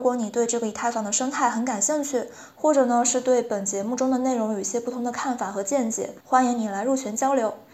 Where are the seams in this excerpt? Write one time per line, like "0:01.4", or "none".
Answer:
0:06.2

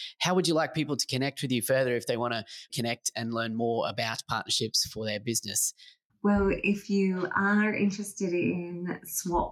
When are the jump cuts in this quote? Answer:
0:02.7
0:06.1

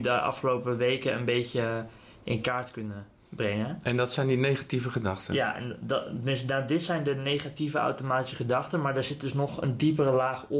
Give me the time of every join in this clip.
none

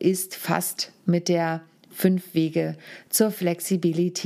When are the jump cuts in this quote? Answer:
none

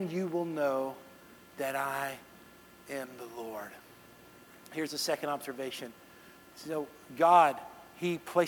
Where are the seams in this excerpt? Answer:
none

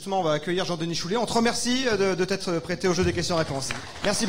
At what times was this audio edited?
none

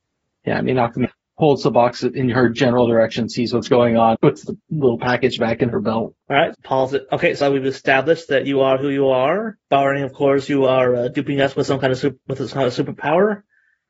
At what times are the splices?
0:01.0
0:04.1
0:04.6
0:06.2
0:06.5
0:07.4
0:09.6

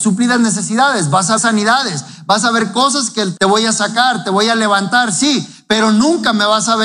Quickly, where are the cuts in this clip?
0:01.4
0:03.4

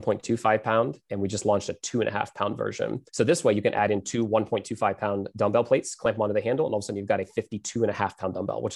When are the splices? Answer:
0:03.1

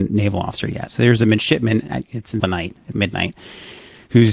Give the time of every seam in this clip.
0:02.4
0:02.9

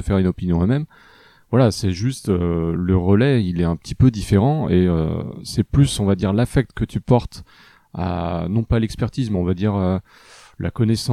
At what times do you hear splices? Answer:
none

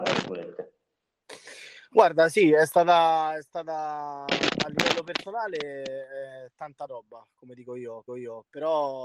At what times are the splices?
0:06.9
0:08.1

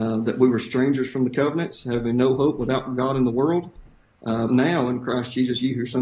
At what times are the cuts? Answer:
0:04.5

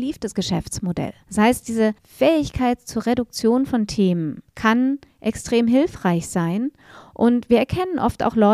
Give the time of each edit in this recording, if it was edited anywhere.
0:01.2
0:02.0
0:04.5

